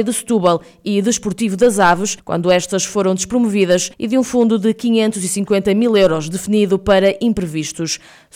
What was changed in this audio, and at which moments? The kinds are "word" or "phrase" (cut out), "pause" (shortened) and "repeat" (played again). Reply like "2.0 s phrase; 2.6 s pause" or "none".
2.2 s pause; 3.9 s pause